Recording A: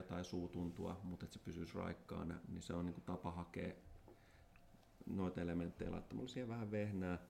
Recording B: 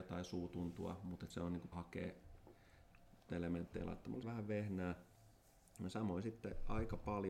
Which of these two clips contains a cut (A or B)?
B